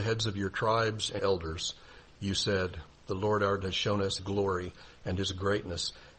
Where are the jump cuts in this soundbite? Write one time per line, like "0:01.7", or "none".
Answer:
0:01.2
0:03.0
0:03.6
0:04.2